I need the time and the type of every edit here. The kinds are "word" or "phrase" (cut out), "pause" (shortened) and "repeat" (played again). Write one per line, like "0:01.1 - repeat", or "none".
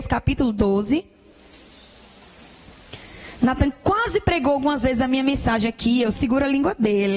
0:06.1 - word